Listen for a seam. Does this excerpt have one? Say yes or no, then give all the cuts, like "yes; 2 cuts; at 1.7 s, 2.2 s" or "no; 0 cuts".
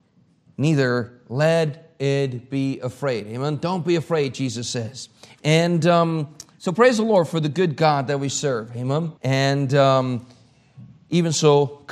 yes; 2 cuts; at 5.3 s, 9.2 s